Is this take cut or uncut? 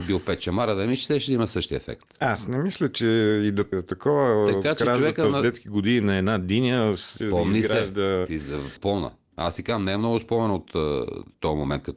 cut